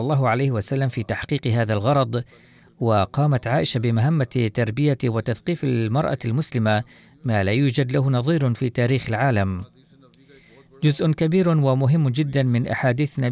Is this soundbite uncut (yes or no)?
yes